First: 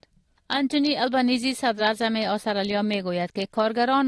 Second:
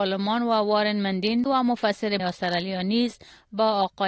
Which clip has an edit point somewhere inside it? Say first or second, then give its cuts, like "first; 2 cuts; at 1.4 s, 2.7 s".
second; 2 cuts; at 1.5 s, 2.2 s